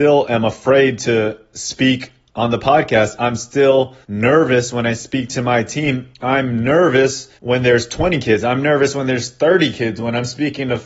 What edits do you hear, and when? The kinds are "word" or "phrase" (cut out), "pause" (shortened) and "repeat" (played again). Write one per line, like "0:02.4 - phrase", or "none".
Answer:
0:04.0 - pause
0:07.4 - pause

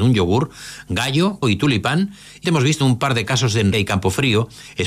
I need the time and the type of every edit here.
0:01.4 - word
0:02.4 - word
0:02.8 - word
0:03.7 - word

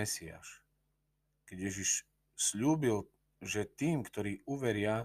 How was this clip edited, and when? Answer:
none

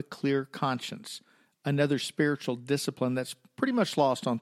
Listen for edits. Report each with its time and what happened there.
none

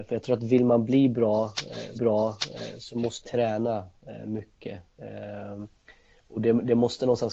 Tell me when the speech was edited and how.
0:01.9 - repeat
0:03.2 - phrase

